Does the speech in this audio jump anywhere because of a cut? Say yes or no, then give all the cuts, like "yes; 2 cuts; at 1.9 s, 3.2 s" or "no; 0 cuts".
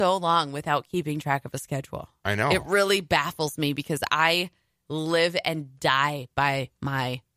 no; 0 cuts